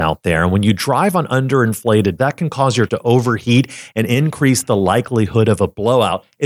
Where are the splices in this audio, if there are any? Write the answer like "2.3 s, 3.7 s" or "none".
2.2 s, 2.9 s